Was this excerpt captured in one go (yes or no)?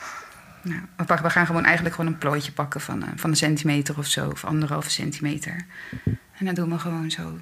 yes